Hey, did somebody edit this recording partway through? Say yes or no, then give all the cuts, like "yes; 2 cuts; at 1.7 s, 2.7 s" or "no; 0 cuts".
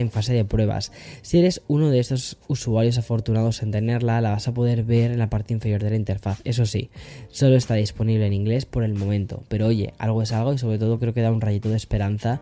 no; 0 cuts